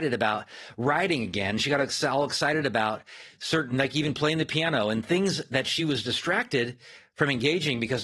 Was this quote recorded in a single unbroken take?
yes; 0 cuts

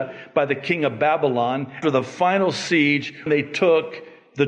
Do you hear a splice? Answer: yes; 2 cuts; at 1.8 s, 3.3 s

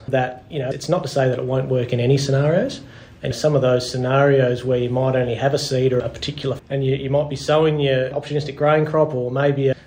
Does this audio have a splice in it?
yes; 2 cuts; at 6.0 s, 6.6 s

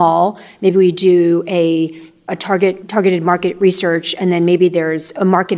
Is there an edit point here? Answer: no; 0 cuts

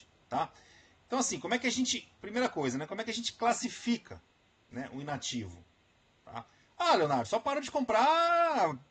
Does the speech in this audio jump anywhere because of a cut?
no; 0 cuts

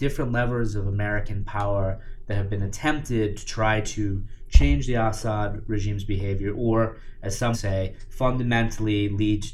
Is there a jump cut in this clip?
yes; 1 cut; at 7.5 s

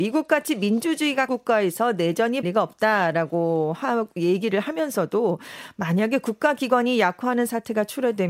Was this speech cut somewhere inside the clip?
yes; 2 cuts; at 1.3 s, 2.4 s

